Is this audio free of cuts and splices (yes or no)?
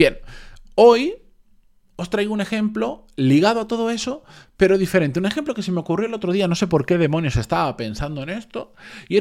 yes